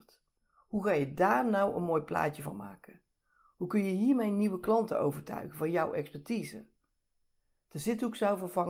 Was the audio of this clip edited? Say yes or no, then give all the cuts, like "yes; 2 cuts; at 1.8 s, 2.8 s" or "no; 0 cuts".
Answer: no; 0 cuts